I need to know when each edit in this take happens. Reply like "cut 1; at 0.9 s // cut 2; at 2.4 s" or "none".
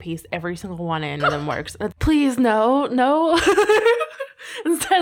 cut 1; at 1.2 s // cut 2; at 1.9 s